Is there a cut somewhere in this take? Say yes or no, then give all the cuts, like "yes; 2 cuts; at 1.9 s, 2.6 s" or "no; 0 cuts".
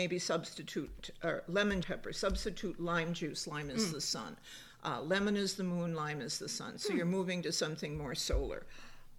yes; 1 cut; at 1.8 s